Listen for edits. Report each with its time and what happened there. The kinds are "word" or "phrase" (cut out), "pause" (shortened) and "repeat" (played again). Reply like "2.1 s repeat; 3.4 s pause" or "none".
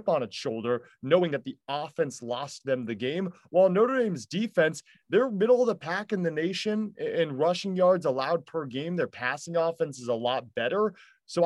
none